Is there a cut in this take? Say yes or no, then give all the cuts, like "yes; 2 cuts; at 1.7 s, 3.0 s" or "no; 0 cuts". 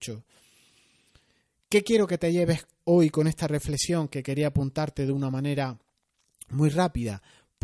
no; 0 cuts